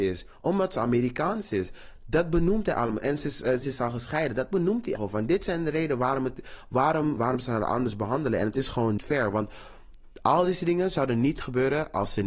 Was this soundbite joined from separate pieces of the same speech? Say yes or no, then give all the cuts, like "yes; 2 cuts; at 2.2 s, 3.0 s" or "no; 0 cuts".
yes; 4 cuts; at 3.6 s, 5.0 s, 7.2 s, 9.0 s